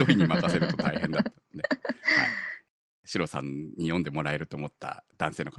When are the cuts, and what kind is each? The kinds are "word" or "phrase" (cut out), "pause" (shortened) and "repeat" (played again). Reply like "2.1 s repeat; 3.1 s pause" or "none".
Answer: none